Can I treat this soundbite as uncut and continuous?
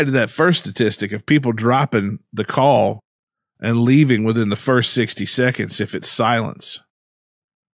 yes; 0 cuts

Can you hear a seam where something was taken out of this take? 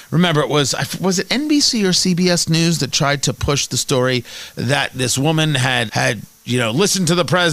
yes; 1 cut; at 5.9 s

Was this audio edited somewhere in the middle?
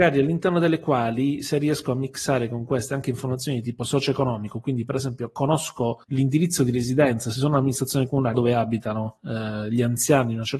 yes; 2 cuts; at 6.0 s, 8.3 s

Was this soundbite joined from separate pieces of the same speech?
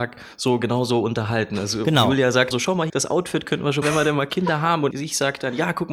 yes; 4 cuts; at 2.5 s, 2.9 s, 3.8 s, 4.9 s

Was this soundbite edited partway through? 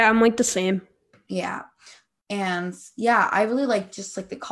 no; 0 cuts

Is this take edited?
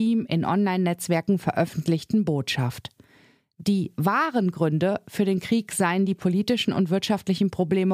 no; 0 cuts

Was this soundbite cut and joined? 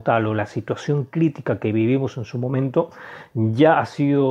no; 0 cuts

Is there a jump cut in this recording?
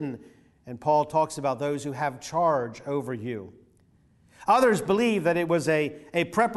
no; 0 cuts

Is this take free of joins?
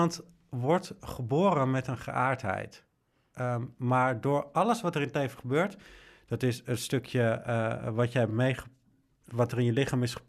yes; 0 cuts

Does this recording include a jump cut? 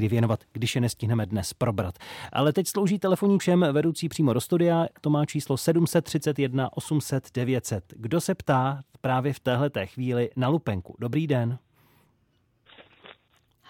yes; 1 cut; at 3.4 s

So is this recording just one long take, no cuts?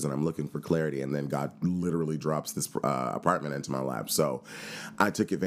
yes; 0 cuts

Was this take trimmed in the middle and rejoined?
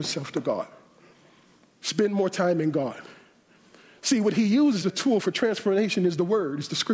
yes; 1 cut; at 4.8 s

